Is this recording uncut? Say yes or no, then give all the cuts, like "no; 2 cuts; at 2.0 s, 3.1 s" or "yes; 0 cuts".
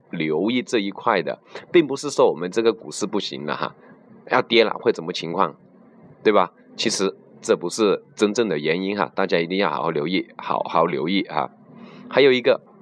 yes; 0 cuts